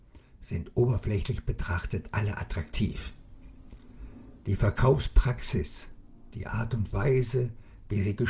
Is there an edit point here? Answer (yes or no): yes